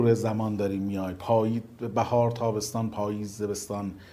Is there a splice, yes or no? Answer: no